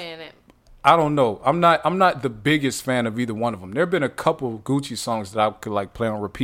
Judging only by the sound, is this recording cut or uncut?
uncut